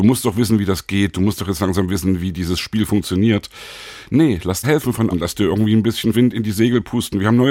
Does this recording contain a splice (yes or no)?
yes